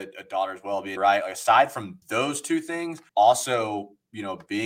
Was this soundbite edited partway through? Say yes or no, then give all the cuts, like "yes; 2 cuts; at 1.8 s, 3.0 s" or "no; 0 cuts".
yes; 3 cuts; at 1.0 s, 2.0 s, 3.1 s